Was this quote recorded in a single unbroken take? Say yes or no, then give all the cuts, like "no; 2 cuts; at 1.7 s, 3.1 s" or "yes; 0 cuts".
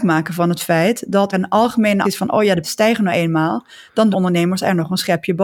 no; 4 cuts; at 1.3 s, 2.0 s, 2.6 s, 4.1 s